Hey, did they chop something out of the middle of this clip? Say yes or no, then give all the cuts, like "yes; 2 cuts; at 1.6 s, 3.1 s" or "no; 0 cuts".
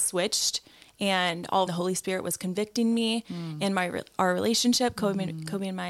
yes; 1 cut; at 1.7 s